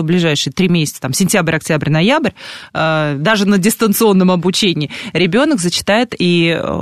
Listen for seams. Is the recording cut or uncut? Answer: uncut